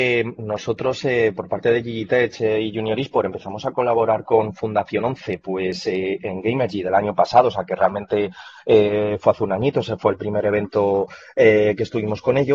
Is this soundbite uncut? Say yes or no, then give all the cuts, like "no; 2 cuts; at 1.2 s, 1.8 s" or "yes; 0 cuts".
yes; 0 cuts